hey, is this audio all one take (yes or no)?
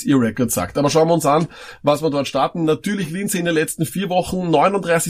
yes